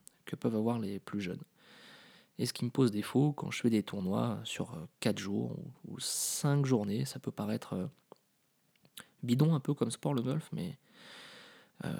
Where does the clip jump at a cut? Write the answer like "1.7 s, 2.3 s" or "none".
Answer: none